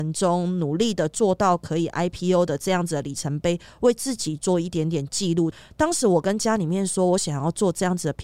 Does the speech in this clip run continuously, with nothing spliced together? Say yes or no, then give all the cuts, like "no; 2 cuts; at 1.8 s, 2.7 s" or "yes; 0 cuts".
yes; 0 cuts